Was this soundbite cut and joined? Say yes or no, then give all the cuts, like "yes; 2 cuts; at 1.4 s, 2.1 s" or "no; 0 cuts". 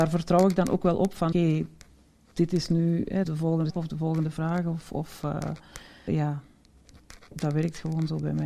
yes; 4 cuts; at 1.3 s, 3.2 s, 3.7 s, 6.1 s